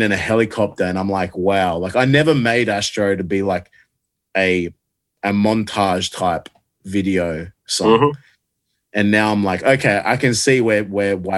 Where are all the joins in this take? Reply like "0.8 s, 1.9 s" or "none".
none